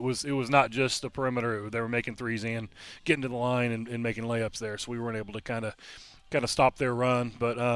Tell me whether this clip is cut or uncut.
uncut